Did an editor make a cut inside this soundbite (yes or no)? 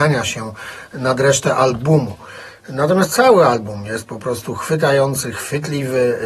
no